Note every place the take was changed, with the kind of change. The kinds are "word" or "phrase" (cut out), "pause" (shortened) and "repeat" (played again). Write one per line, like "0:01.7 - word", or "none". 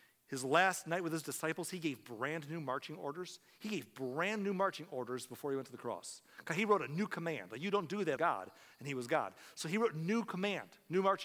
0:08.2 - phrase